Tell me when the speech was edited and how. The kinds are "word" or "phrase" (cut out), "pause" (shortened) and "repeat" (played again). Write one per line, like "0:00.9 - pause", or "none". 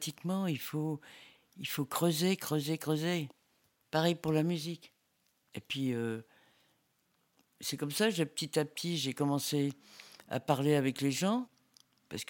none

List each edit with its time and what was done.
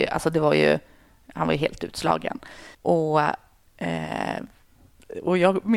0:02.7 - pause

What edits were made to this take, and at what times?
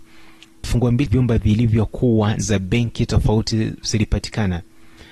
0:01.1 - word
0:02.4 - word

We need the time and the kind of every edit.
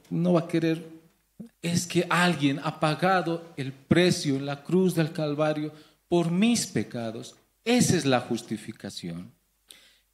0:01.5 - pause

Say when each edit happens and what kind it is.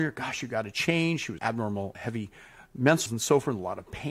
0:01.4 - word
0:01.9 - word
0:03.1 - word

